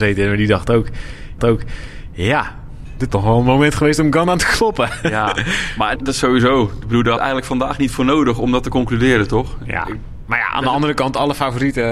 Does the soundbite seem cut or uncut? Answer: cut